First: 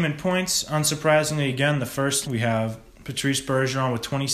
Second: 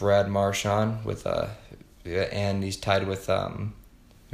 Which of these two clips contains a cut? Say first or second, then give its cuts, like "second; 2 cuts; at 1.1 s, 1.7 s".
first; 1 cut; at 2.2 s